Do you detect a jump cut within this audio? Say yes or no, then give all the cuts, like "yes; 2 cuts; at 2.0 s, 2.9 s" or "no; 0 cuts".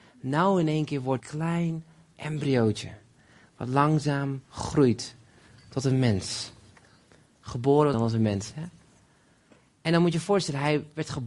yes; 3 cuts; at 1.2 s, 4.4 s, 7.9 s